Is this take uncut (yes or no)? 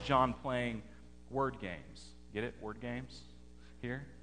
yes